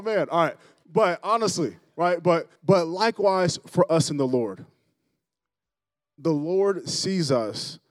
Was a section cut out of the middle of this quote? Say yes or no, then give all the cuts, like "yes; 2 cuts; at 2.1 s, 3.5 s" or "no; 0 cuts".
yes; 1 cut; at 2.6 s